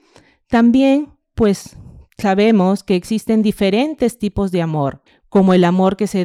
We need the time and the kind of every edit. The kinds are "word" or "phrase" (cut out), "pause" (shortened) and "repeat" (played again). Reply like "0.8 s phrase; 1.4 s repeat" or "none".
5.1 s pause